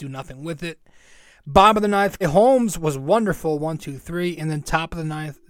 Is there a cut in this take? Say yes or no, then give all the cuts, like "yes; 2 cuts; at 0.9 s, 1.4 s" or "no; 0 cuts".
yes; 1 cut; at 2.2 s